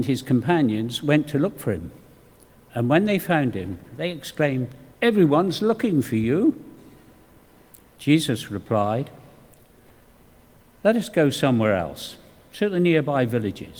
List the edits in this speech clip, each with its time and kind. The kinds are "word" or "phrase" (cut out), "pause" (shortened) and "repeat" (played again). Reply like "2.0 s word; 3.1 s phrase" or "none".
4.9 s pause